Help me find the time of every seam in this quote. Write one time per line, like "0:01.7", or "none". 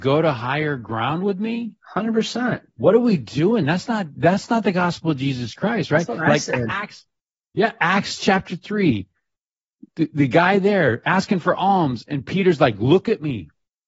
none